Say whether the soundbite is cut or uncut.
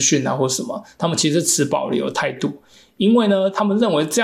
uncut